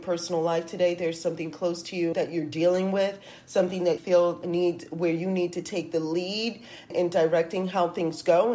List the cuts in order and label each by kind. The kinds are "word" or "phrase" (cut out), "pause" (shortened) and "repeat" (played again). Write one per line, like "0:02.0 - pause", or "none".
0:01.5 - word
0:02.1 - word
0:04.0 - word
0:04.4 - word
0:06.9 - word